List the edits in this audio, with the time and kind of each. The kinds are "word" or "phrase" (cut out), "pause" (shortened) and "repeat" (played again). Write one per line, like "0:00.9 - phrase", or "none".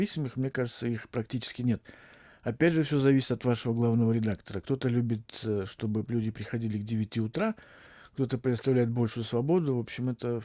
none